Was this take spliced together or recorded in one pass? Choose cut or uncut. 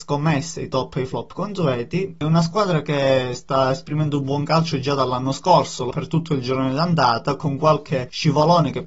cut